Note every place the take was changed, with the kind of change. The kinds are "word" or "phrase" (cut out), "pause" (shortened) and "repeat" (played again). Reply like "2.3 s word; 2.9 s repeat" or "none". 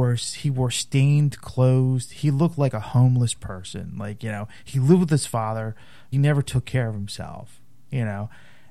6.1 s phrase